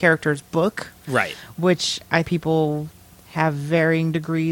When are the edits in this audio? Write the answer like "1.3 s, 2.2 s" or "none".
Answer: 2.2 s

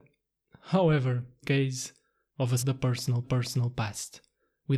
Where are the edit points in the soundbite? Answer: 1.4 s, 2.6 s, 3.2 s

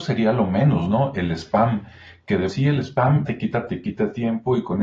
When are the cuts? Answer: 2.5 s, 3.3 s, 3.7 s

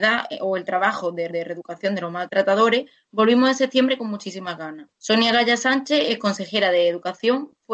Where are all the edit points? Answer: 1.3 s, 4.9 s

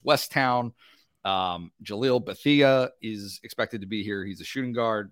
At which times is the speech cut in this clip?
3.0 s

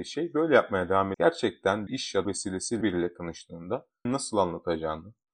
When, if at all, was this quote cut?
1.1 s, 1.9 s, 2.2 s, 2.8 s, 4.1 s

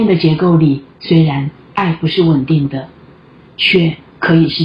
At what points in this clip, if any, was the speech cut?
0.9 s

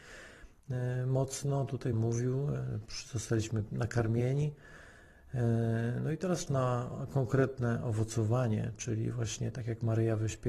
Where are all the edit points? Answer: 1.9 s, 6.5 s

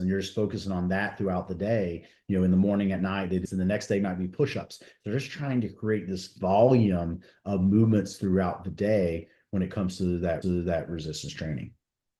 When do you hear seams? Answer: 3.4 s, 10.4 s

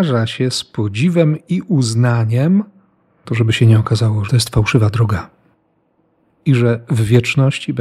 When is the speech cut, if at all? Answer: 3.2 s, 4.3 s

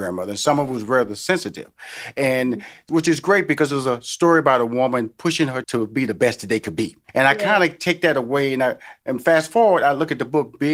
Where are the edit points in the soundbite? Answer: 5.6 s

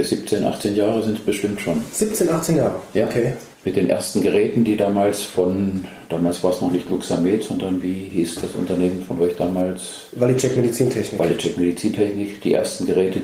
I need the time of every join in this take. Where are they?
3.5 s

